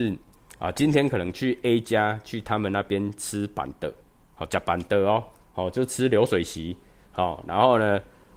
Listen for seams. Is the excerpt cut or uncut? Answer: uncut